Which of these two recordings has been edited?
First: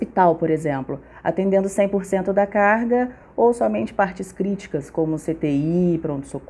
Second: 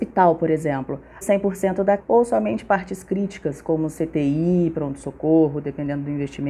second; 2 cuts; at 1.2 s, 2.0 s

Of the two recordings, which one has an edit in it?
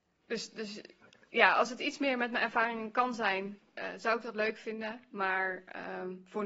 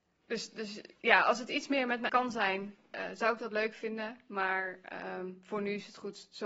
second; 2 cuts; at 1.0 s, 2.1 s

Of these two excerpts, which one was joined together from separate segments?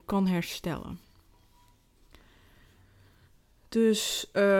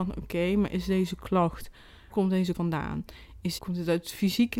second; 3 cuts; at 2.1 s, 2.5 s, 3.6 s

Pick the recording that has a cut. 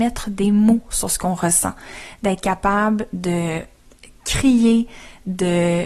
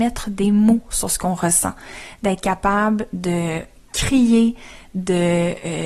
second; 1 cut; at 3.8 s

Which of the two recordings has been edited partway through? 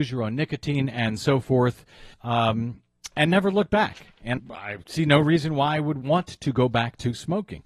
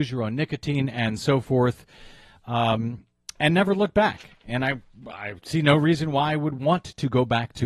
first; 2 cuts; at 2.1 s, 4.4 s

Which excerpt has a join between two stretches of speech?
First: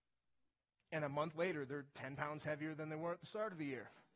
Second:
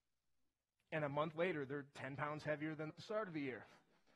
second; 1 cut; at 2.9 s

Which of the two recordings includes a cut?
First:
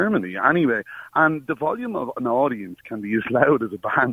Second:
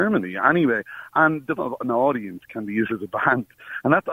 second; 2 cuts; at 1.6 s, 2.9 s

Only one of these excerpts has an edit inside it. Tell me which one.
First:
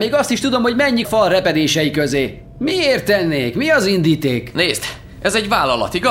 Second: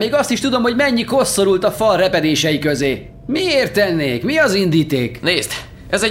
first; 1 cut; at 1.0 s

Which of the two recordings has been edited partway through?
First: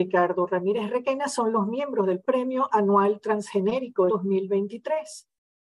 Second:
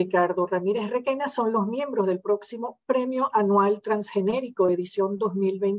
first; 2 cuts; at 2.2 s, 4.1 s

